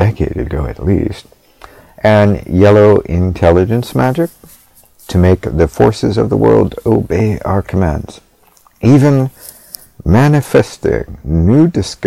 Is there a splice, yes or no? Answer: no